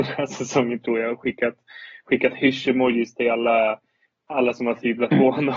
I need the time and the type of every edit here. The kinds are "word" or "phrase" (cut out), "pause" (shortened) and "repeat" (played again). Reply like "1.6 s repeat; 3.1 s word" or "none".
none